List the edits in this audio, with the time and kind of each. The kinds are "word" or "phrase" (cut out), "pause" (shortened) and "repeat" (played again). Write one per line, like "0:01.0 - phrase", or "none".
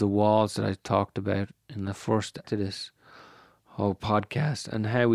0:02.4 - word